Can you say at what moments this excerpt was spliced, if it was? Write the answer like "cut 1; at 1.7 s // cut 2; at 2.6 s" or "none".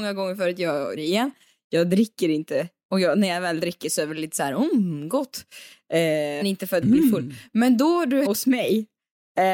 cut 1; at 1.0 s // cut 2; at 6.4 s // cut 3; at 8.3 s